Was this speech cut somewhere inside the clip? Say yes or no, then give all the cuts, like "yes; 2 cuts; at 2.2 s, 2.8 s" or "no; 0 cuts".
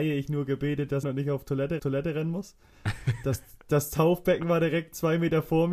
yes; 2 cuts; at 1.0 s, 1.8 s